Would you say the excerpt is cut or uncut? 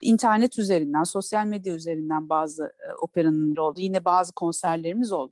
cut